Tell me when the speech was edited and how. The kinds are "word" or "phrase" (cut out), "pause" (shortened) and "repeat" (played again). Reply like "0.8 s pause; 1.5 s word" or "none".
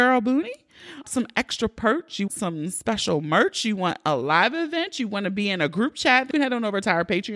1.0 s word; 2.3 s word; 6.3 s word